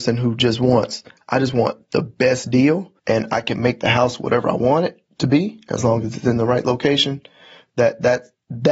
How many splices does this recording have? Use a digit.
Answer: 1